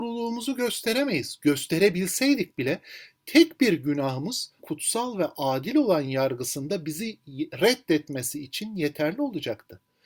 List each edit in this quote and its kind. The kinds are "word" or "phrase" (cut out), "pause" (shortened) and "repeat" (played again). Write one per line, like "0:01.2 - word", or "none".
0:04.6 - word